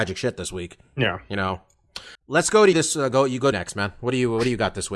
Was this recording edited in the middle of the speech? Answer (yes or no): yes